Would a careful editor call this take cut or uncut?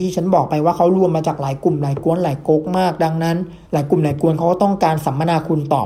cut